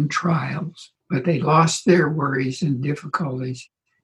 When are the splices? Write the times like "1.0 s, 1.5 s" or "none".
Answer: 1.0 s